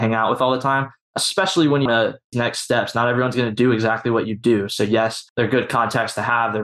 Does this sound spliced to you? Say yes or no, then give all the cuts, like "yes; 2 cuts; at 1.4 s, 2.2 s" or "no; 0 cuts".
yes; 3 cuts; at 1.9 s, 2.3 s, 5.3 s